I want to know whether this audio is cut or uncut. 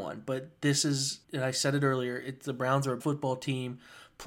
cut